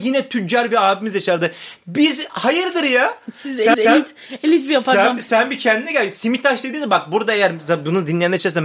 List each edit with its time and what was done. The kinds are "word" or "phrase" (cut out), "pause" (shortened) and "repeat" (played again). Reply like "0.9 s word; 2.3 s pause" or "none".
3.7 s repeat